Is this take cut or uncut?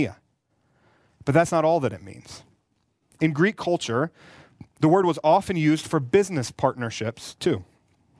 uncut